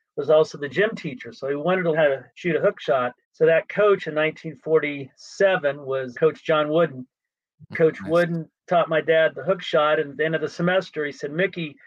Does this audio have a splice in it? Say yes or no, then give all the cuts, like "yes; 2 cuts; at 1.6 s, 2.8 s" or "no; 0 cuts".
yes; 6 cuts; at 1.9 s, 2.3 s, 3.2 s, 6.1 s, 7.7 s, 8.6 s